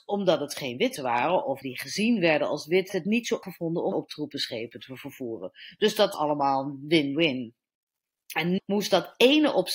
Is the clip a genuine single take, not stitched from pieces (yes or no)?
no